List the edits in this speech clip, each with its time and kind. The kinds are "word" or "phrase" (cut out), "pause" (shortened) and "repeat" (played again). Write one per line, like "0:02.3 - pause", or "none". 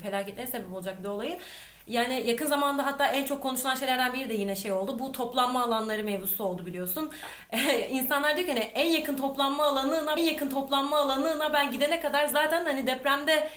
0:10.2 - repeat